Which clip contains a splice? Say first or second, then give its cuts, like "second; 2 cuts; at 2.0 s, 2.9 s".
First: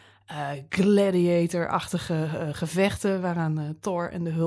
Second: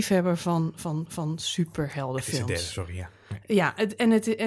second; 1 cut; at 1.1 s